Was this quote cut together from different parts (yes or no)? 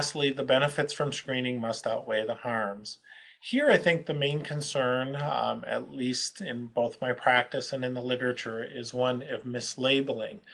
no